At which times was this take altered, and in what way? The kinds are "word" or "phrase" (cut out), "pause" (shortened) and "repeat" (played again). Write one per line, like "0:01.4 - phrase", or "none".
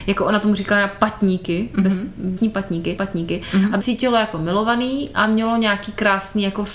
0:02.4 - word
0:03.0 - repeat
0:03.8 - word

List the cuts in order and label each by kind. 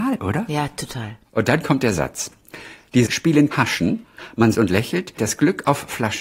0:01.2 - pause
0:03.1 - word
0:03.5 - word
0:04.5 - word
0:05.2 - word

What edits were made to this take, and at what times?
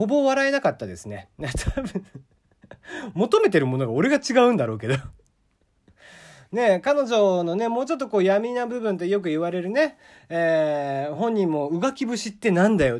none

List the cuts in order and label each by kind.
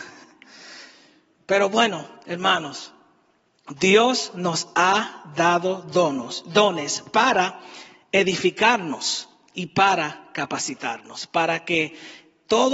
none

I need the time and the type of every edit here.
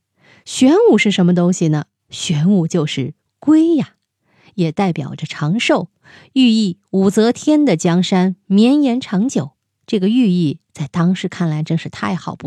none

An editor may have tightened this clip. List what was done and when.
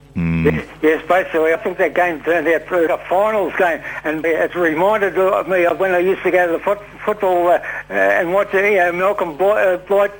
0:01.5 - word
0:02.9 - word
0:04.2 - word

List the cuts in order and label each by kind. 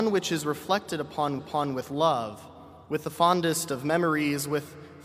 0:01.4 - repeat
0:02.8 - pause

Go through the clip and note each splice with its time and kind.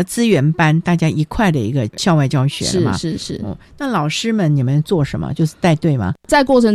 none

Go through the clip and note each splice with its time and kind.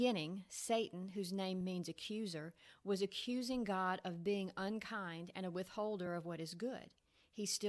none

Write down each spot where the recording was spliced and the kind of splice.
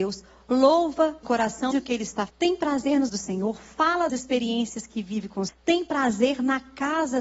0:01.2 - word
0:01.7 - word
0:02.3 - word
0:03.1 - word
0:04.1 - word
0:05.5 - word

